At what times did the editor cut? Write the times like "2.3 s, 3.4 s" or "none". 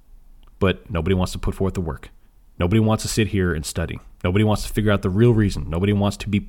2.2 s, 4.1 s